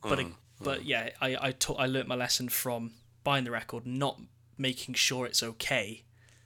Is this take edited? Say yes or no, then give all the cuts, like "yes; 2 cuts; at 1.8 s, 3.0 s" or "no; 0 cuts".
no; 0 cuts